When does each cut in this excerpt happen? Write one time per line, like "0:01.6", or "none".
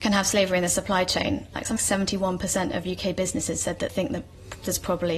0:01.8
0:03.9